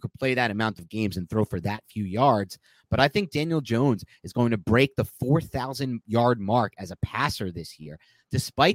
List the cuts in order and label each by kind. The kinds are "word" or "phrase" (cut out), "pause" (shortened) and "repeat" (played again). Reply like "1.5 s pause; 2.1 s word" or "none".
none

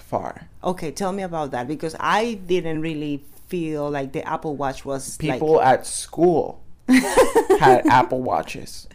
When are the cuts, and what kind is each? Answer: none

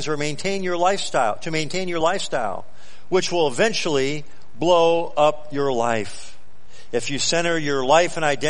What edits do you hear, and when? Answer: none

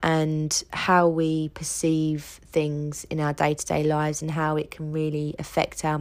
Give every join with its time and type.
none

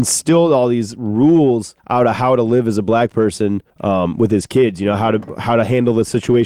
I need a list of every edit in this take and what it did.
1.8 s pause; 3.7 s pause

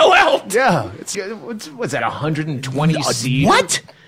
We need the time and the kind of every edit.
1.1 s word; 2.0 s word

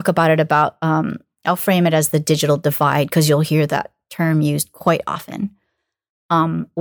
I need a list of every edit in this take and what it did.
none

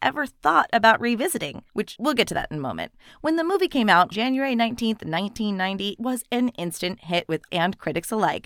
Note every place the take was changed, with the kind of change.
2.0 s word; 4.1 s word; 6.0 s word; 7.5 s word

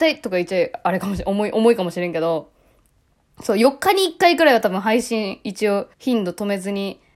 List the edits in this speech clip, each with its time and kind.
5.9 s pause

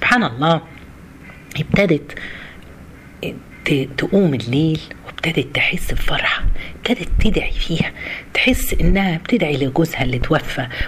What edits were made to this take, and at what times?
none

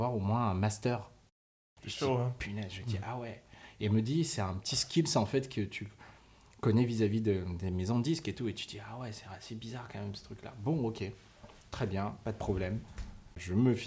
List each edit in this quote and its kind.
none

